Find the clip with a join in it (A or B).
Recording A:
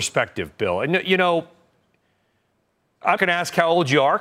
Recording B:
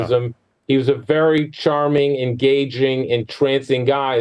A